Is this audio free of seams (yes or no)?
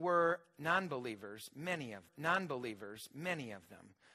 no